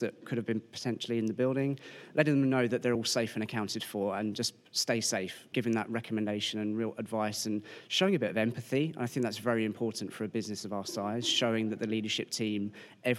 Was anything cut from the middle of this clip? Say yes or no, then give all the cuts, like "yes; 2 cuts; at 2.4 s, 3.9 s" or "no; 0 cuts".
no; 0 cuts